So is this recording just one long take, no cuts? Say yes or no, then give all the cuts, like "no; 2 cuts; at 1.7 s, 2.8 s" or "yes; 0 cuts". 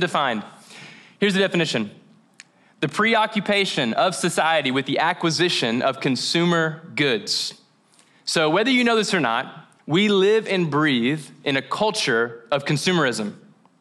no; 1 cut; at 9.8 s